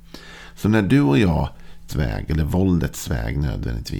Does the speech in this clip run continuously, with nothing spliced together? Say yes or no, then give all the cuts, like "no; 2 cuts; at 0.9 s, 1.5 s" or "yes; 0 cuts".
no; 1 cut; at 1.9 s